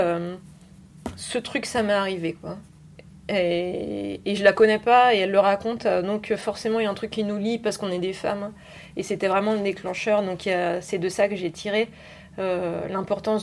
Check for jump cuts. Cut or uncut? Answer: uncut